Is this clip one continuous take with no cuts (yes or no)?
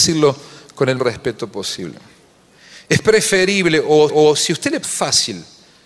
no